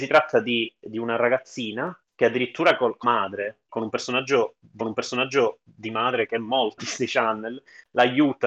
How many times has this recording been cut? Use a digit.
5